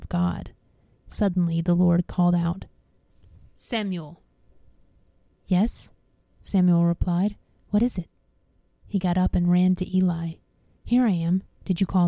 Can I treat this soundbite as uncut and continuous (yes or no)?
yes